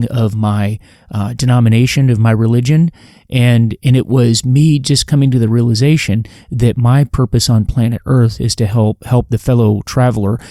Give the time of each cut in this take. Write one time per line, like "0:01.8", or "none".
none